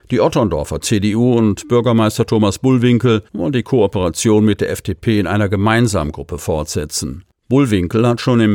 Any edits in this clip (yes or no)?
yes